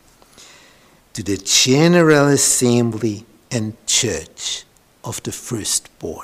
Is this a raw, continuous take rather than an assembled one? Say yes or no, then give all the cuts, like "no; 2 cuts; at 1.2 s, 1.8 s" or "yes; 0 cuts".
yes; 0 cuts